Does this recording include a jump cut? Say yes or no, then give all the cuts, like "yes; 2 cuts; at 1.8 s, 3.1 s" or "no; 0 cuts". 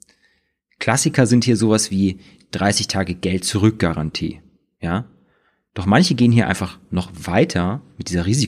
no; 0 cuts